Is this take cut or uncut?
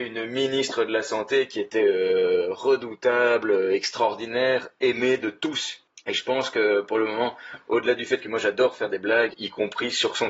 uncut